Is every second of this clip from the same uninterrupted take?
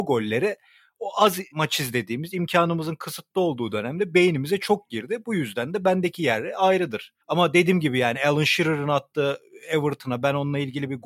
no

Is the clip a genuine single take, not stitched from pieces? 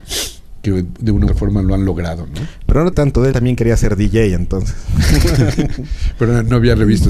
no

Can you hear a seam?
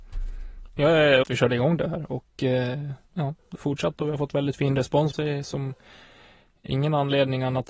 yes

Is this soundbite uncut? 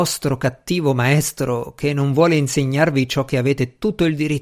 yes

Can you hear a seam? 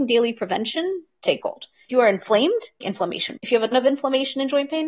yes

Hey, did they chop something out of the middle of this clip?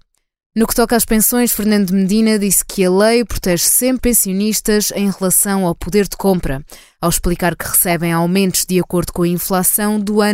yes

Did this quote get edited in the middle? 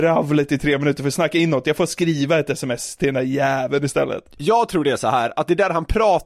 no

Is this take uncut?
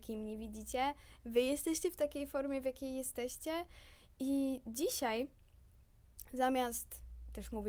yes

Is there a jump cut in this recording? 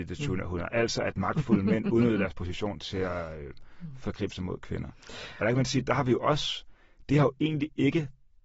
no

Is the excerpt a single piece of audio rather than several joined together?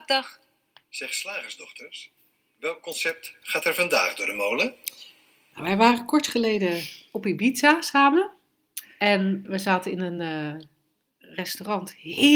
yes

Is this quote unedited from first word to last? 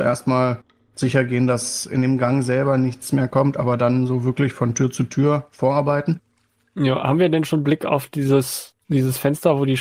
yes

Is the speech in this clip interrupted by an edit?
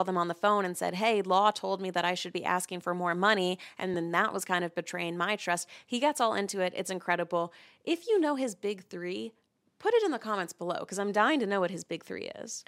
no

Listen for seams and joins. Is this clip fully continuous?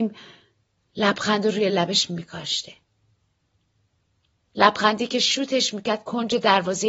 yes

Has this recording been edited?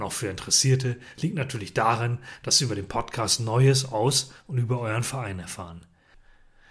no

